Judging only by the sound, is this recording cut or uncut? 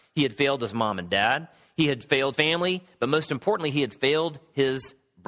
cut